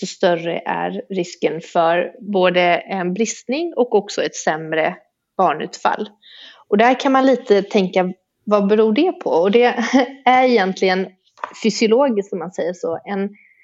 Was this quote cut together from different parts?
no; 0 cuts

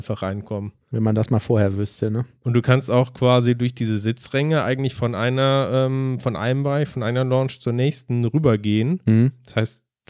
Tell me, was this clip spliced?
no; 0 cuts

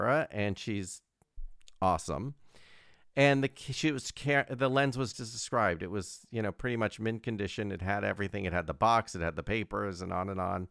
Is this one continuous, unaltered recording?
no; 1 cut; at 5.1 s

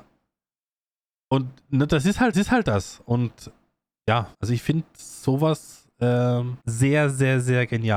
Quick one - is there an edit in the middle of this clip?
yes; 3 cuts; at 2.3 s, 4.3 s, 6.6 s

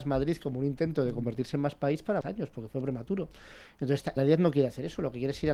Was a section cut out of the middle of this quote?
yes; 2 cuts; at 2.2 s, 4.2 s

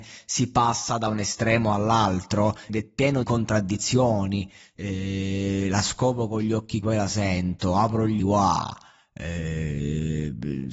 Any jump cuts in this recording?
yes; 4 cuts; at 2.7 s, 3.2 s, 6.8 s, 8.2 s

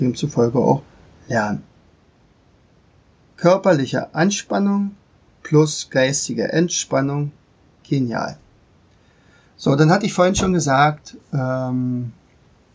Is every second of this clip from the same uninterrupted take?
yes; 0 cuts

